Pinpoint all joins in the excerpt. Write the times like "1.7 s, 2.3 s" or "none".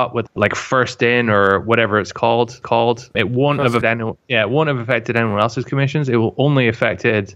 2.6 s, 3.8 s